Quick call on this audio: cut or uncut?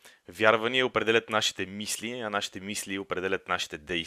uncut